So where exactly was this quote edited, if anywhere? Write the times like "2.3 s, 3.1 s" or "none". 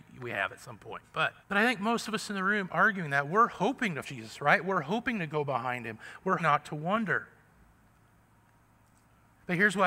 1.4 s, 2.7 s, 4.0 s, 6.4 s